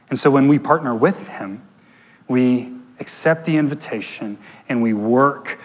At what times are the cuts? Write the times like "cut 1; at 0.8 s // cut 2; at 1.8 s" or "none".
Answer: none